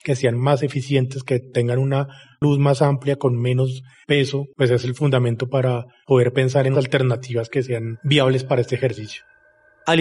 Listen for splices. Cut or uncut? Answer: cut